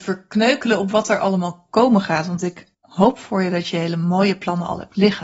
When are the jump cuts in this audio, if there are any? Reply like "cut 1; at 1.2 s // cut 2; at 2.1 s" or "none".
cut 1; at 2.7 s